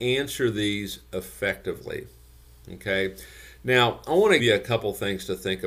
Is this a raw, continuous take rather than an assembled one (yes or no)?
no